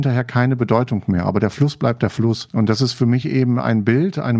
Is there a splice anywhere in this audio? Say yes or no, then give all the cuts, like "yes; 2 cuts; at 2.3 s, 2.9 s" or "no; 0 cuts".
no; 0 cuts